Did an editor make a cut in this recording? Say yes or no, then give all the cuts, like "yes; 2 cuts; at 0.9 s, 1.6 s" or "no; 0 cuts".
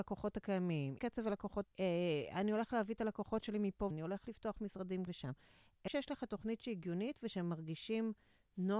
yes; 5 cuts; at 1.0 s, 1.6 s, 3.9 s, 5.1 s, 5.9 s